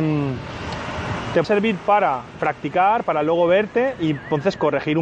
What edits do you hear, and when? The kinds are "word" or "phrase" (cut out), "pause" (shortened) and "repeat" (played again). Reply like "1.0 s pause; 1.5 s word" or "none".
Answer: 1.4 s word; 2.4 s word

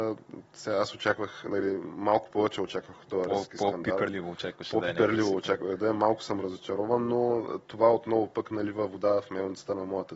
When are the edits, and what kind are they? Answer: none

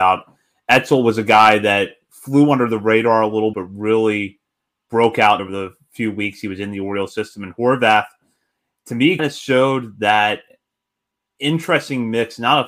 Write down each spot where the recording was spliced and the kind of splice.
3.5 s word; 5.4 s word; 9.2 s word

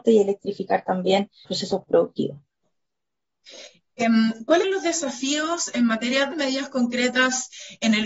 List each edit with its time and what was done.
1.5 s word; 4.6 s word; 6.3 s word

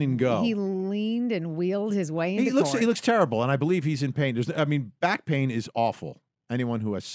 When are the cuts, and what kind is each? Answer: none

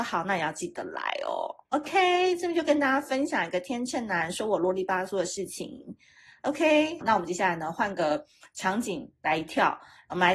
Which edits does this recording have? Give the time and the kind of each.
7.0 s word

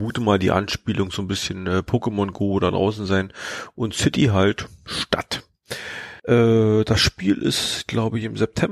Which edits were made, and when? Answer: 6.2 s pause

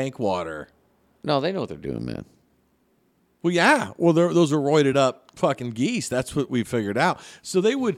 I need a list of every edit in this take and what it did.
none

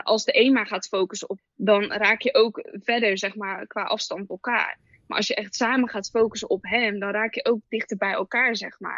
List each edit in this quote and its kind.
1.4 s word; 4.3 s word

